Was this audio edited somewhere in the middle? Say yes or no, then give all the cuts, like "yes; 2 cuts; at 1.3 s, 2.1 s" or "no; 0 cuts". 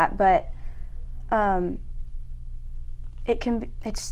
no; 0 cuts